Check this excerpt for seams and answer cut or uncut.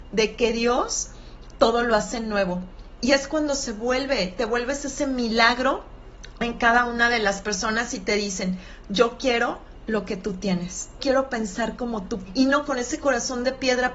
cut